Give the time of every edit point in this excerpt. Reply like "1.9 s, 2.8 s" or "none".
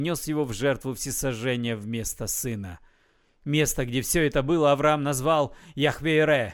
none